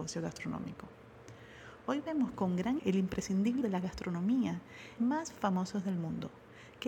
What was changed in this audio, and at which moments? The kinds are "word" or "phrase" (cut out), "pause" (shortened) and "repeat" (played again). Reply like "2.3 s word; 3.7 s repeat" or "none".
2.8 s word; 3.6 s word; 5.0 s phrase